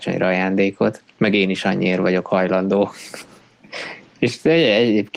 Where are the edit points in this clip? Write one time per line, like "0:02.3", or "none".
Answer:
none